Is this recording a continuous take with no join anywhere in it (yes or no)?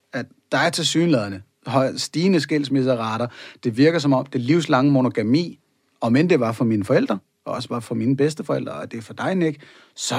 yes